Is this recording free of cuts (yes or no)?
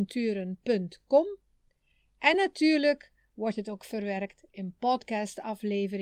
yes